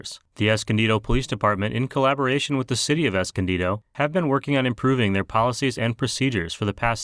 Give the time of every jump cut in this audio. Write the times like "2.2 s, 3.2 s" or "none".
none